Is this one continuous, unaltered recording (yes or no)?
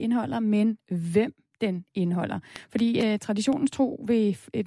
yes